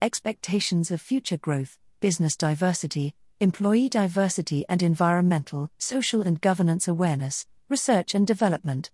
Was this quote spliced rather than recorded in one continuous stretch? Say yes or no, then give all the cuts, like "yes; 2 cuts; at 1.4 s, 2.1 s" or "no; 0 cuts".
yes; 1 cut; at 5.7 s